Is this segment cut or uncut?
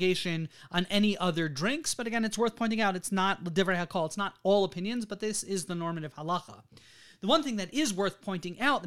uncut